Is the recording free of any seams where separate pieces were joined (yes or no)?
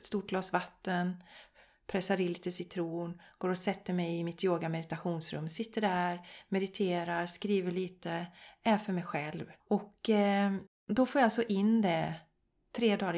no